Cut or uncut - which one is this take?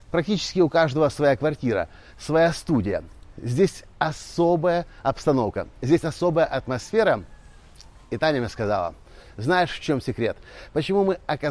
uncut